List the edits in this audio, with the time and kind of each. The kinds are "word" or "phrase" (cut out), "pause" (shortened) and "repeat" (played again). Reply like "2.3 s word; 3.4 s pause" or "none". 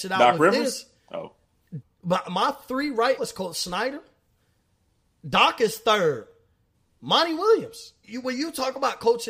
1.8 s word; 2.2 s word; 3.2 s word; 8.0 s word